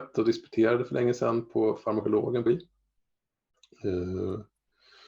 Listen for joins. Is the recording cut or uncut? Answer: cut